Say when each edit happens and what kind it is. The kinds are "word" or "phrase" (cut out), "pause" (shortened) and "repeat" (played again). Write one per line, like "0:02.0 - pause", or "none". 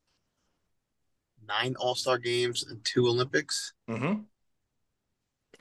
none